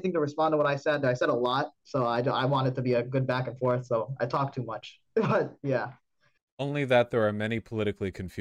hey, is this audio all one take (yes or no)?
no